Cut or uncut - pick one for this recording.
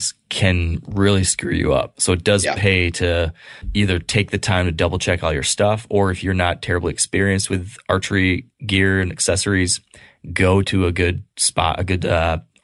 uncut